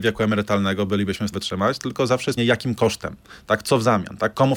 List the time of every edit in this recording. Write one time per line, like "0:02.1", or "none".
0:01.3
0:02.4